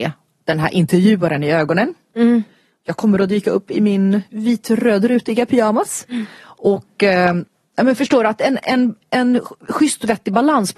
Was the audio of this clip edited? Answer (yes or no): no